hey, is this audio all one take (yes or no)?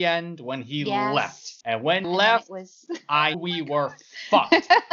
no